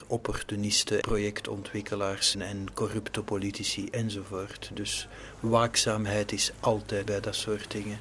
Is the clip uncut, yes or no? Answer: no